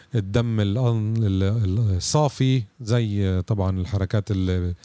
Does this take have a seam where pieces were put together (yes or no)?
no